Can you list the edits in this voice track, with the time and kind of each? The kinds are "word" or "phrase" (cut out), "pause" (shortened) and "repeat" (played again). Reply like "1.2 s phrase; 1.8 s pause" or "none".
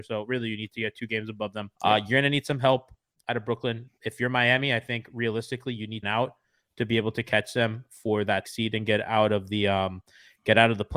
1.8 s pause; 6.0 s phrase; 8.4 s word

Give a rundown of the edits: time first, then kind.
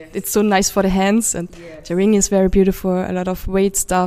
none

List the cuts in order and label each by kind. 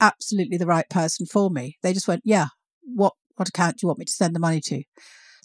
none

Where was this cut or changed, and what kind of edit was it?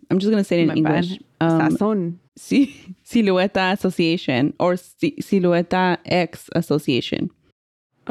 2.3 s pause

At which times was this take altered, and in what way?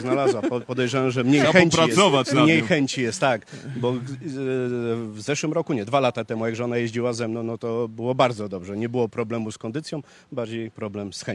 none

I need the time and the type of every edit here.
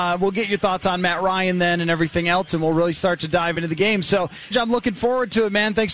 4.5 s word

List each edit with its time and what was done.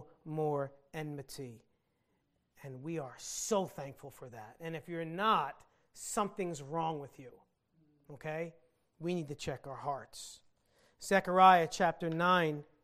none

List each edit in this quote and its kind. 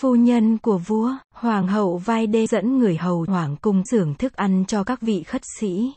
1.2 s pause; 2.5 s phrase; 3.3 s word; 3.9 s word

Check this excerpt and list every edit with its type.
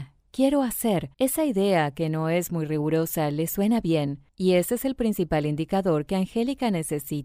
1.1 s pause; 4.3 s pause

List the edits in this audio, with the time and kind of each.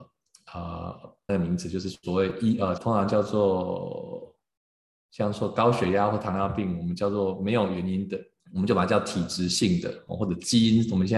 1.3 s phrase; 2.8 s phrase; 8.4 s pause

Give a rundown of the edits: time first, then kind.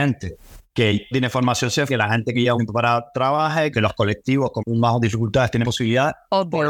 1.1 s word; 1.9 s word; 2.5 s word; 3.7 s word; 4.6 s word; 5.6 s word

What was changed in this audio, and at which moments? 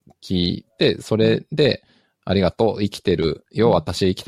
none

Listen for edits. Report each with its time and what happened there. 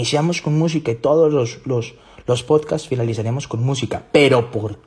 none

